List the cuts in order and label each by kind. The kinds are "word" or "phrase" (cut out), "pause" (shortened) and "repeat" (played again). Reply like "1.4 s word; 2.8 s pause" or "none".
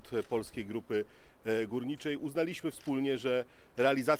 none